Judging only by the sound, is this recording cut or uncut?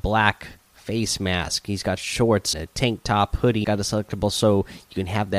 cut